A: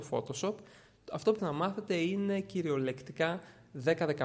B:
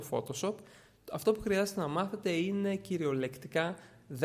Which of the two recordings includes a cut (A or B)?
A